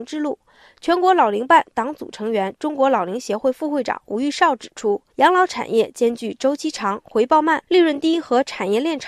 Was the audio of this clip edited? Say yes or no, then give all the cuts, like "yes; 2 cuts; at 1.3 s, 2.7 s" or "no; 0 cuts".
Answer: yes; 2 cuts; at 5.1 s, 7.6 s